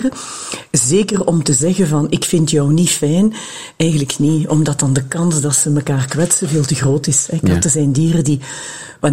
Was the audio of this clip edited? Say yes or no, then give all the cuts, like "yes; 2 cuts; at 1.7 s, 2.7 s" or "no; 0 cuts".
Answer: no; 0 cuts